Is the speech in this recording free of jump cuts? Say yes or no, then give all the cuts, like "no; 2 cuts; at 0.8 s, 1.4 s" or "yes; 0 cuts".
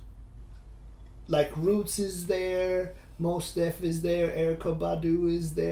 yes; 0 cuts